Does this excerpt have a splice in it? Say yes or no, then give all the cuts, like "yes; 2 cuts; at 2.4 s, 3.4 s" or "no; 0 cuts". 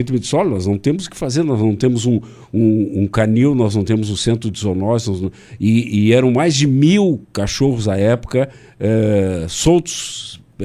yes; 1 cut; at 7.2 s